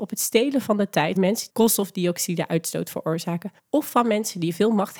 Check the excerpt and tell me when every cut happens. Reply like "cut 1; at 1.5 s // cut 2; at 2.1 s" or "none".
cut 1; at 1.2 s // cut 2; at 1.5 s // cut 3; at 3.6 s